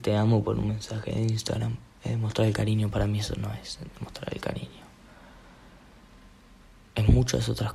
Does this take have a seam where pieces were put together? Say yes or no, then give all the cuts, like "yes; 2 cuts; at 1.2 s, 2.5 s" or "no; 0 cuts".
no; 0 cuts